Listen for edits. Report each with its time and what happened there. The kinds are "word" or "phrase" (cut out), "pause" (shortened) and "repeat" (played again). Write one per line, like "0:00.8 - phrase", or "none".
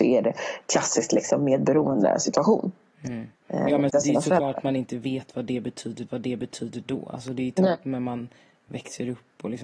0:03.3 - pause
0:03.9 - word
0:06.1 - repeat